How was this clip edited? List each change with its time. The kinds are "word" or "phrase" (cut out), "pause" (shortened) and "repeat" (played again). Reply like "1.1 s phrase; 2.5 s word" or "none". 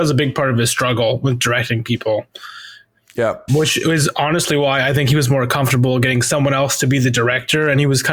3.5 s word